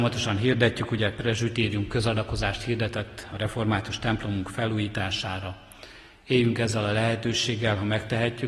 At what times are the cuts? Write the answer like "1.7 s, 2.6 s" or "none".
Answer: none